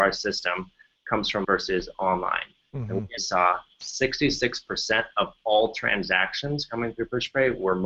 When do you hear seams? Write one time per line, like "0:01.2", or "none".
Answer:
0:01.4
0:03.2